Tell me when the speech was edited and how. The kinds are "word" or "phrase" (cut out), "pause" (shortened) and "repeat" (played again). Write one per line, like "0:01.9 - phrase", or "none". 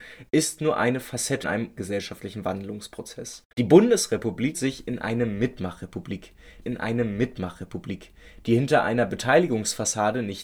0:01.4 - word
0:01.8 - word
0:03.5 - pause
0:04.5 - word
0:06.6 - repeat